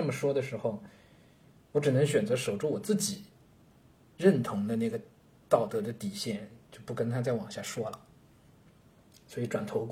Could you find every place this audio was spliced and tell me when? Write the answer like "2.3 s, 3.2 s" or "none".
6.6 s